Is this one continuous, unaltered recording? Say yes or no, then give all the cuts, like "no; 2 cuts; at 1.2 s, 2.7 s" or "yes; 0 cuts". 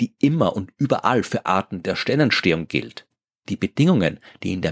no; 1 cut; at 1.5 s